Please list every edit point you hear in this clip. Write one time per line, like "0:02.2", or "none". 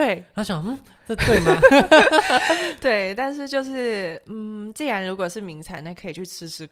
none